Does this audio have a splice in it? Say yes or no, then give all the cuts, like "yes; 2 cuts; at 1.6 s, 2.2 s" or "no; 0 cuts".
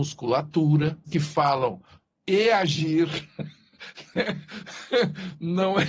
yes; 2 cuts; at 1.1 s, 2.1 s